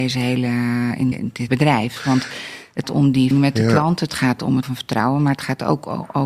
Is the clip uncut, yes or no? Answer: no